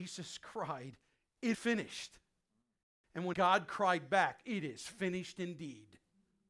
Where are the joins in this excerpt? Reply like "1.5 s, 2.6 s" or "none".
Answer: 1.5 s, 3.3 s